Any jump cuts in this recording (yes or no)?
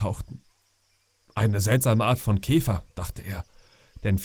no